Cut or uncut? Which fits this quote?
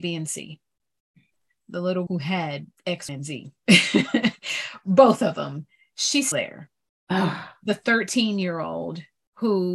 cut